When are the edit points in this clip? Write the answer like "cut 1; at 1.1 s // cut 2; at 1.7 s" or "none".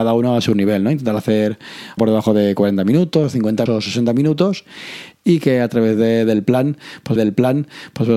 cut 1; at 2.0 s // cut 2; at 3.7 s // cut 3; at 7.2 s